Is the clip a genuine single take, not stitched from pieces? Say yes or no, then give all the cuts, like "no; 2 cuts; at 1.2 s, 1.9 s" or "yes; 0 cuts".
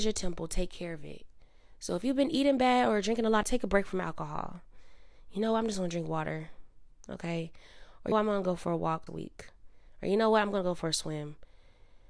no; 3 cuts; at 3.4 s, 8.1 s, 9.1 s